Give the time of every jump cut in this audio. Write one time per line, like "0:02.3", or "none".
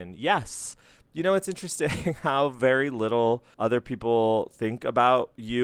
none